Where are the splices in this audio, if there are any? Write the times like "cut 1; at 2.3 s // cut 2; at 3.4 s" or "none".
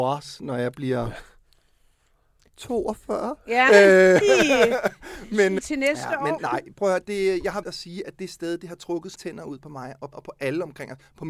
cut 1; at 4.2 s // cut 2; at 5.6 s // cut 3; at 6.4 s // cut 4; at 7.6 s // cut 5; at 9.1 s // cut 6; at 10.1 s